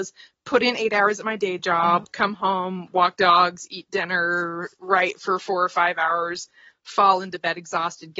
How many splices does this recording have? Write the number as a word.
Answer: zero